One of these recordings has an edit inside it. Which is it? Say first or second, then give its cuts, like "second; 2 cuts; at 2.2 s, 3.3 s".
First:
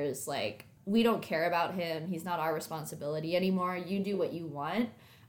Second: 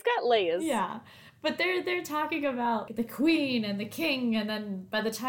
second; 1 cut; at 2.9 s